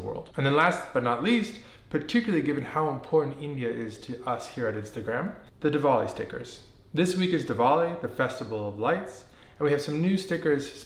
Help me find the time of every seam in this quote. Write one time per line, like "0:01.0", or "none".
none